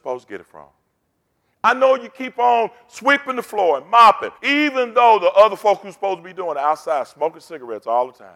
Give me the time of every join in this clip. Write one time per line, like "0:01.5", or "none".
0:04.4